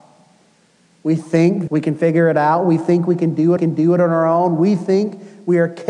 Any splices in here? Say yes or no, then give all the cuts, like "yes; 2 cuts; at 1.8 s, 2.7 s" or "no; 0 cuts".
yes; 2 cuts; at 1.7 s, 3.6 s